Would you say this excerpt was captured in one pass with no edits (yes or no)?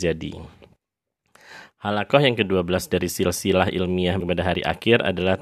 no